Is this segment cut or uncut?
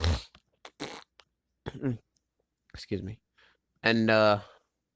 uncut